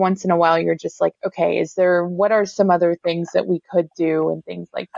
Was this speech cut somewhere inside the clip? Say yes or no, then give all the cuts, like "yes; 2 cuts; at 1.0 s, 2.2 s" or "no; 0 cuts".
no; 0 cuts